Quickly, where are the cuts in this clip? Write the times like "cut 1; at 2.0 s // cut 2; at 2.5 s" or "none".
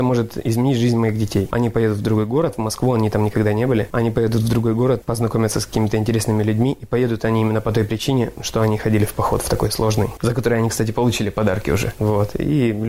none